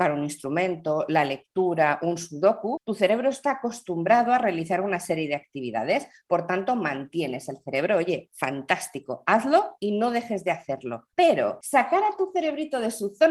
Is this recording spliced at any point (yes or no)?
yes